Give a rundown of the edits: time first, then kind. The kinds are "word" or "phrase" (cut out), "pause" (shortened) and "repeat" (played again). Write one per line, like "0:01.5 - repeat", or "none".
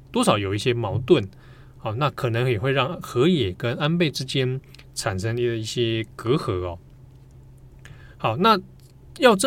0:08.1 - pause